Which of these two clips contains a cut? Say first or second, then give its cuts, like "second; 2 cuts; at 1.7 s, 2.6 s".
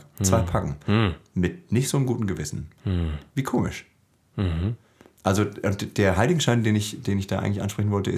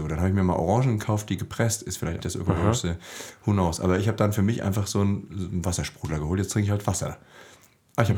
second; 1 cut; at 2.2 s